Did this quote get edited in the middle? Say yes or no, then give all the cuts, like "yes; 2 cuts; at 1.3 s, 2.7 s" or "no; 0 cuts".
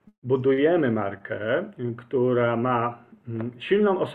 no; 0 cuts